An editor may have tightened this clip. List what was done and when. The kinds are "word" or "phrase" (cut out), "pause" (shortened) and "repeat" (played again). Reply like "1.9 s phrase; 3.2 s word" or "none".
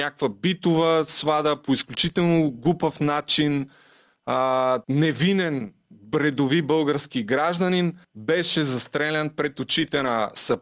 4.8 s pause; 8.0 s pause